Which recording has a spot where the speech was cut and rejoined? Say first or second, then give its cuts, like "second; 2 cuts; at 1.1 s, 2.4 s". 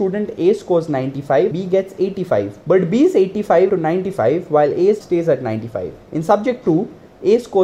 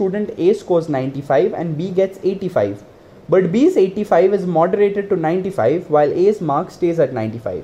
first; 5 cuts; at 1.5 s, 2.6 s, 3.7 s, 5.0 s, 6.0 s